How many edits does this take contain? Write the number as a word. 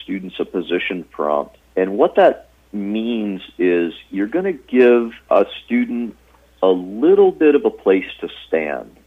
two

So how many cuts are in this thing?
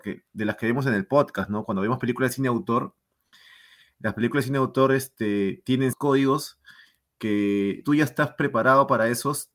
two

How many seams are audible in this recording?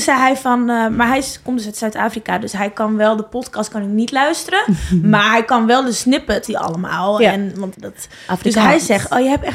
two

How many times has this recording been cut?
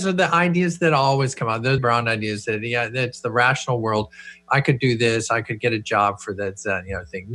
one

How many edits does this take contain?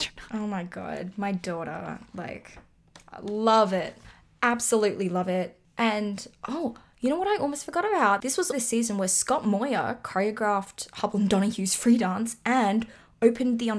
two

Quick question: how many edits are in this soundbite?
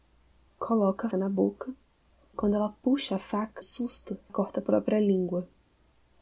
four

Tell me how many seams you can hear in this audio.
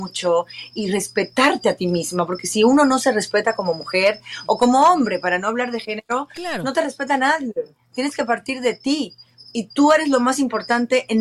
zero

